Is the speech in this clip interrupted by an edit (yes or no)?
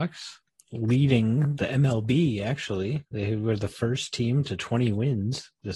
yes